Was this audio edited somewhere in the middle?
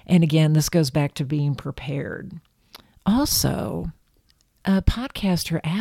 no; 0 cuts

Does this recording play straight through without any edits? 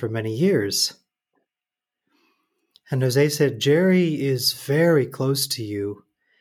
yes; 0 cuts

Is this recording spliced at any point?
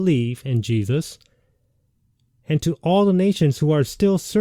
no; 0 cuts

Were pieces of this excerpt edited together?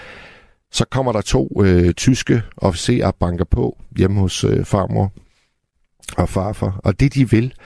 no; 0 cuts

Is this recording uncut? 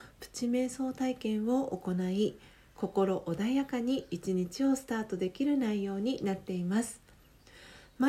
yes; 0 cuts

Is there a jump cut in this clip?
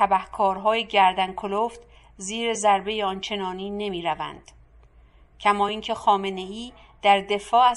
no; 0 cuts

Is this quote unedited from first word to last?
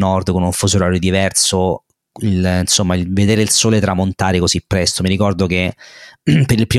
yes; 0 cuts

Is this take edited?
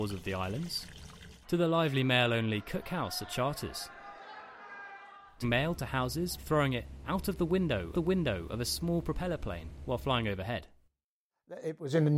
yes; 4 cuts; at 1.4 s, 5.4 s, 6.4 s, 7.9 s

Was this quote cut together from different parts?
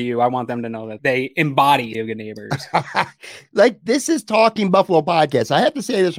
yes; 2 cuts; at 1.0 s, 1.9 s

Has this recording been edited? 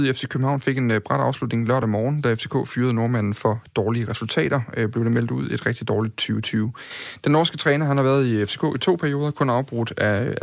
no; 0 cuts

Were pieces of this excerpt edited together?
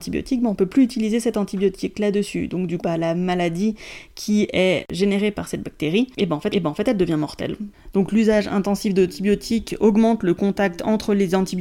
yes; 2 cuts; at 2.8 s, 6.5 s

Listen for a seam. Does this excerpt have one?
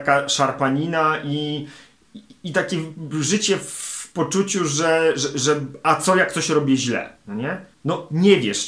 yes; 1 cut; at 7.7 s

